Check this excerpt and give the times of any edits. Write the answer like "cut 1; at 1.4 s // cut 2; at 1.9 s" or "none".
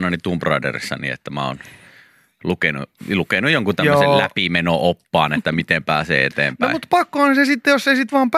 none